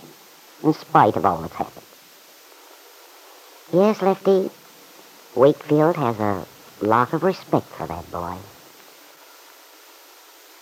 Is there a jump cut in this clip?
no; 0 cuts

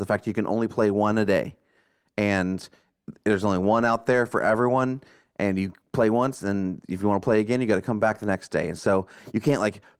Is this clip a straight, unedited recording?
yes; 0 cuts

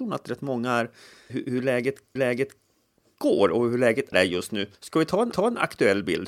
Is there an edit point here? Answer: yes; 5 cuts; at 1.3 s, 2.2 s, 4.1 s, 4.7 s, 5.3 s

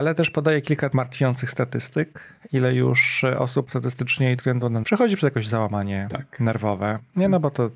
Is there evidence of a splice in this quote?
yes; 3 cuts; at 0.9 s, 4.4 s, 4.8 s

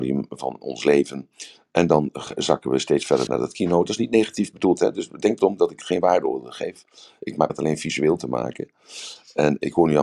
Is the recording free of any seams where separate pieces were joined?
no; 3 cuts; at 3.3 s, 5.4 s, 7.5 s

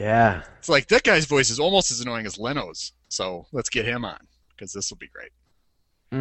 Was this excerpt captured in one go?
yes; 0 cuts

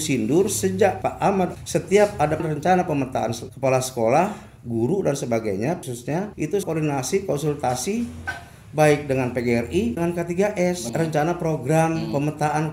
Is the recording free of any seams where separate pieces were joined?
no; 6 cuts; at 1.0 s, 1.5 s, 2.4 s, 5.8 s, 6.6 s, 10.0 s

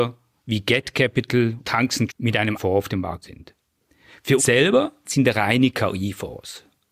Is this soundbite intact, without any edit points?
no; 6 cuts; at 1.6 s, 2.1 s, 2.6 s, 3.2 s, 4.4 s, 5.0 s

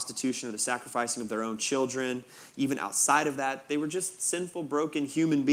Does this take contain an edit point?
no; 0 cuts

